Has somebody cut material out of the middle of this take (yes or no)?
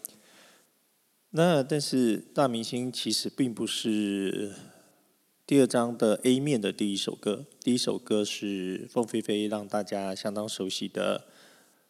no